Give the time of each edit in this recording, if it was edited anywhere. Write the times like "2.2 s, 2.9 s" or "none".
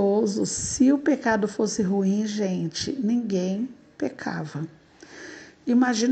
none